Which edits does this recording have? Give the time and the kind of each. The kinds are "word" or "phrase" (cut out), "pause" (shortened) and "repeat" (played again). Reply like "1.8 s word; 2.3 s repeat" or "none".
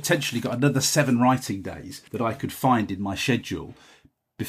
2.1 s pause